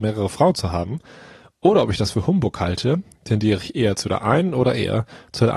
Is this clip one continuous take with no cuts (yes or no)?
yes